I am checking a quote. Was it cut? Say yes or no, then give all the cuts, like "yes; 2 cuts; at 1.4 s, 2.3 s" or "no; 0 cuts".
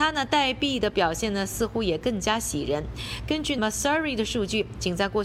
yes; 1 cut; at 3.6 s